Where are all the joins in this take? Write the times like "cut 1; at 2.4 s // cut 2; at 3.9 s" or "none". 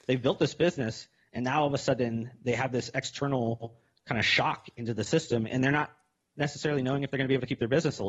none